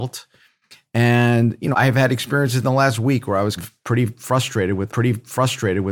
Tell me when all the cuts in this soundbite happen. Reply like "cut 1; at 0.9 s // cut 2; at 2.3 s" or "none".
cut 1; at 1.7 s // cut 2; at 3.6 s // cut 3; at 4.9 s

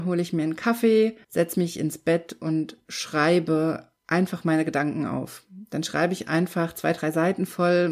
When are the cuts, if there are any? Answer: cut 1; at 1.2 s // cut 2; at 4.0 s

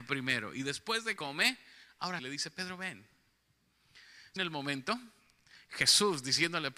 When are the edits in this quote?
cut 1; at 1.2 s // cut 2; at 2.2 s // cut 3; at 4.4 s

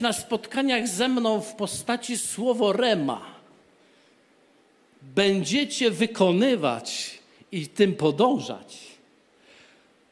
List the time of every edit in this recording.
none

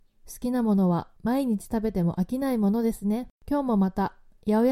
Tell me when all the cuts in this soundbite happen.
cut 1; at 1.2 s // cut 2; at 3.4 s

